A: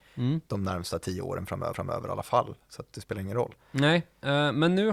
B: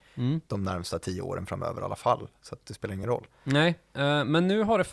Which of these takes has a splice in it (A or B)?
A